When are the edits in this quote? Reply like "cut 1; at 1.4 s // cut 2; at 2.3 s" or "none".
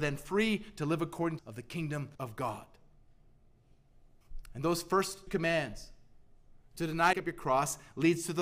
cut 1; at 1.4 s // cut 2; at 2.1 s // cut 3; at 5.3 s // cut 4; at 7.1 s